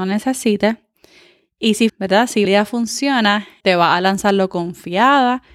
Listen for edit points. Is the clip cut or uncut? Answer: cut